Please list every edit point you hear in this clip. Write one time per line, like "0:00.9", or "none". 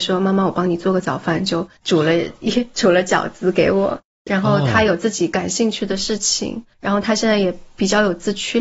0:01.8
0:06.7